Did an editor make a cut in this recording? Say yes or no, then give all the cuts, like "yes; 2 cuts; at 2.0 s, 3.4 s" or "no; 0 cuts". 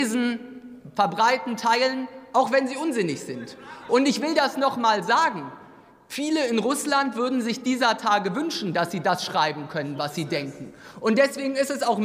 no; 0 cuts